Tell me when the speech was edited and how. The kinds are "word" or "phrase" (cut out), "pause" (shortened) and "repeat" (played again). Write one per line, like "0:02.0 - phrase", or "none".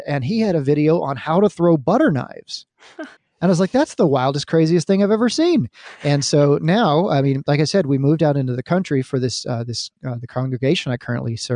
0:03.2 - pause